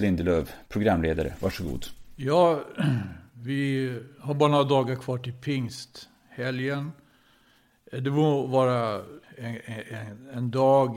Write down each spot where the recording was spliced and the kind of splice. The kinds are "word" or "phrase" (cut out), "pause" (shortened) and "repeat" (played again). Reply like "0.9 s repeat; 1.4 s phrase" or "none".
9.2 s pause